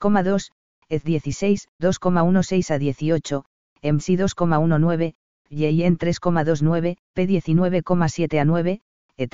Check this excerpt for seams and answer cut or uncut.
cut